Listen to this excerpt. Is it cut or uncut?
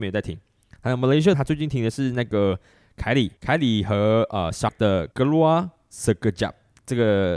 cut